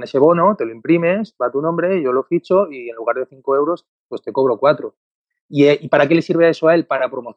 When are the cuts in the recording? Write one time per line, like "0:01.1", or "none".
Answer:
none